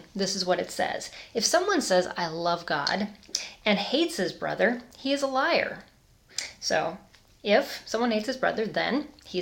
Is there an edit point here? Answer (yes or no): no